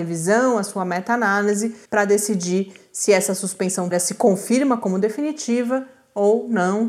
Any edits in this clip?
yes; 2 cuts; at 1.8 s, 3.9 s

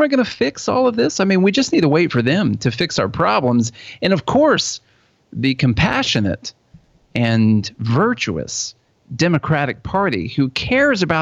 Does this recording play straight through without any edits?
yes; 0 cuts

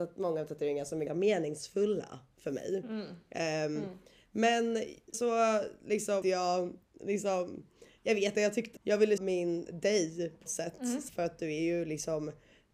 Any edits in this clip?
yes; 9 cuts; at 1.1 s, 5.1 s, 6.2 s, 8.0 s, 8.3 s, 8.8 s, 9.2 s, 10.5 s, 11.1 s

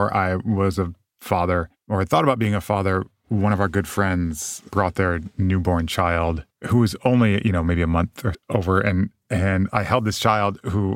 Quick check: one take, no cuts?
no; 2 cuts; at 6.5 s, 8.3 s

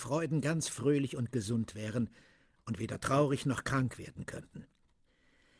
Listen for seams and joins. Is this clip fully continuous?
yes; 0 cuts

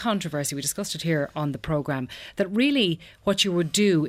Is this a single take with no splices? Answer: yes; 0 cuts

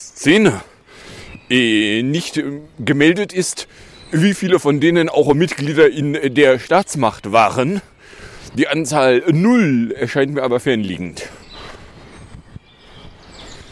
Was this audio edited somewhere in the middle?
no; 0 cuts

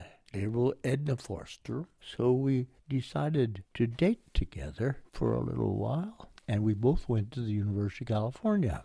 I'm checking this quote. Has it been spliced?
yes; 2 cuts; at 3.7 s, 6.4 s

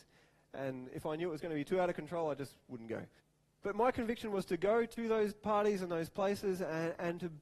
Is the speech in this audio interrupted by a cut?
yes; 1 cut; at 3.2 s

